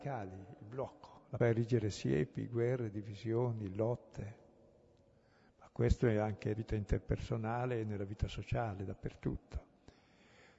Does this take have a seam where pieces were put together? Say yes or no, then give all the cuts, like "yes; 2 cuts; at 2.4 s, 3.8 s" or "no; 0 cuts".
yes; 2 cuts; at 1.4 s, 6.5 s